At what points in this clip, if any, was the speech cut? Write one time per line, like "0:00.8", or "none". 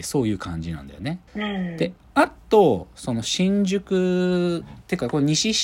0:01.3